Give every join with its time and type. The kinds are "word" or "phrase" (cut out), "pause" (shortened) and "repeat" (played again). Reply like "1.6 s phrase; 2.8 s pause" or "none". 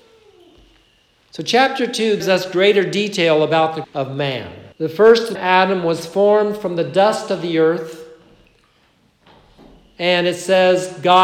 2.2 s word; 3.8 s word; 4.7 s pause; 5.4 s word